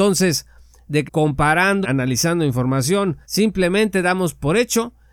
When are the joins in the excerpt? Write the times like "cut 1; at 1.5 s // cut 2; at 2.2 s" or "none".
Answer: cut 1; at 1.1 s // cut 2; at 1.8 s // cut 3; at 3.2 s

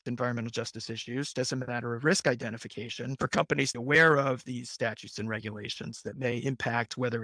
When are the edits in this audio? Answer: cut 1; at 1.3 s // cut 2; at 3.7 s

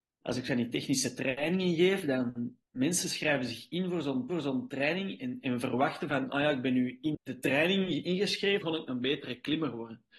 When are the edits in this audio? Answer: cut 1; at 2.7 s // cut 2; at 4.3 s // cut 3; at 7.1 s // cut 4; at 8.6 s

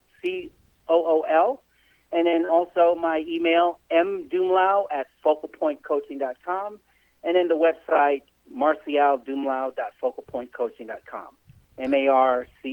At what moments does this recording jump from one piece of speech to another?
none

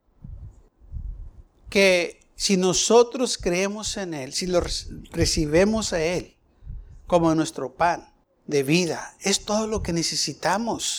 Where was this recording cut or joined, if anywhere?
none

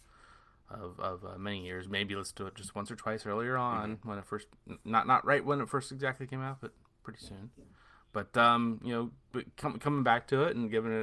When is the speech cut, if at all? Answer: none

